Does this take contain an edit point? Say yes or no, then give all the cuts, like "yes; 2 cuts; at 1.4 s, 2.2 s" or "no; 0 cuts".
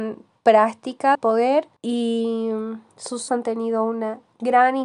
yes; 3 cuts; at 1.1 s, 1.8 s, 3.3 s